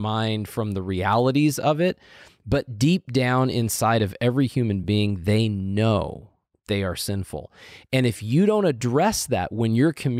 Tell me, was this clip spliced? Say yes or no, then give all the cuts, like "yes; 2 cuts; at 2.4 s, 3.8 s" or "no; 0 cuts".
no; 0 cuts